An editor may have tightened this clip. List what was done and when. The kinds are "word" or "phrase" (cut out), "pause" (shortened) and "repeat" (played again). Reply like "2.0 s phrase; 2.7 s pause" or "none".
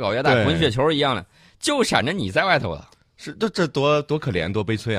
none